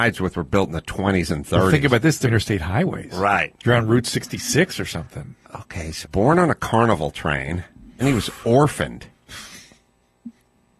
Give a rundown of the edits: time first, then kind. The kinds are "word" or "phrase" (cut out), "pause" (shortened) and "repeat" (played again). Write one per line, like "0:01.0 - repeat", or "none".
0:02.2 - phrase
0:05.4 - pause
0:06.0 - word
0:08.0 - word